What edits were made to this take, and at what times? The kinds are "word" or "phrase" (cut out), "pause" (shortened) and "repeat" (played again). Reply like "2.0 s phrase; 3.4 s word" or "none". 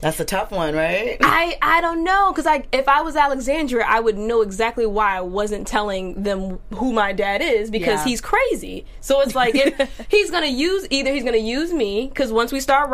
none